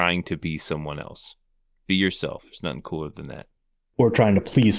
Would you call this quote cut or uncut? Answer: uncut